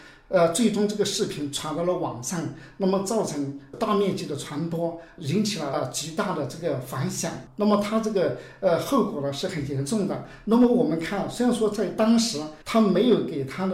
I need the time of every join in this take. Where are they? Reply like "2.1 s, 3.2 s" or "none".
12.6 s